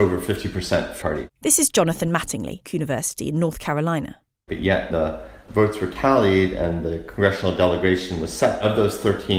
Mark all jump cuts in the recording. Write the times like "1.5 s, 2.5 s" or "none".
1.0 s, 2.7 s, 4.9 s